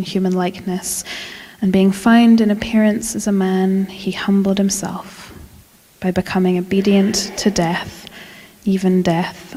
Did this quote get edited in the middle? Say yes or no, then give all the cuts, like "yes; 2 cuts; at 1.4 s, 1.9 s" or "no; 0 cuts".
no; 0 cuts